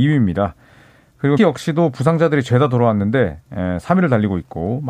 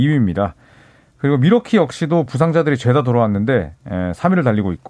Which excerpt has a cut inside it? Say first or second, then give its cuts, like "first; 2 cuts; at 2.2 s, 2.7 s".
first; 1 cut; at 1.4 s